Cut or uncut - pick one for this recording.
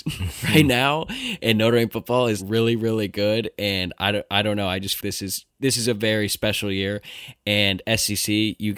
cut